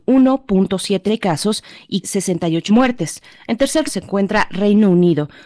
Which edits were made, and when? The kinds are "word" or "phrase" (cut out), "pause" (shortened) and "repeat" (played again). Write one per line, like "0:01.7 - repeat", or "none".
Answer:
0:01.1 - word
0:02.0 - word
0:02.7 - word
0:03.9 - word